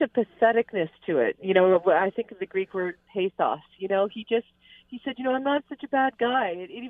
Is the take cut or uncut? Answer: uncut